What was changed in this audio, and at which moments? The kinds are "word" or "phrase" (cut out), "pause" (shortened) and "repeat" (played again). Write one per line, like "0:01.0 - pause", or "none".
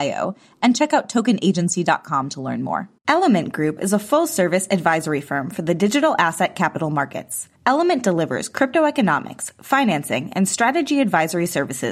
0:03.0 - pause
0:07.6 - pause